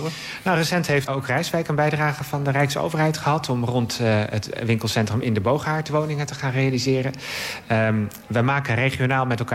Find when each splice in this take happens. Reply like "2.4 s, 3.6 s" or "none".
1.1 s

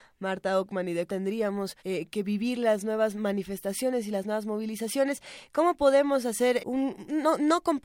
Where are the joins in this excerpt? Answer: 1.1 s, 1.8 s, 6.6 s

